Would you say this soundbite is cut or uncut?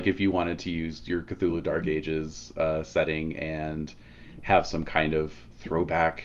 uncut